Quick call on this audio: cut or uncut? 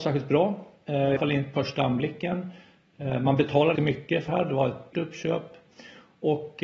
cut